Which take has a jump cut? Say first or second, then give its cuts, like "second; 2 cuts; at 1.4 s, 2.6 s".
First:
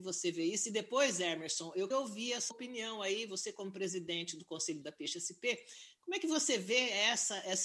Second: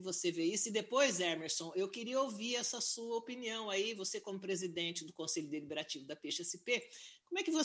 first; 3 cuts; at 1.9 s, 2.5 s, 4.8 s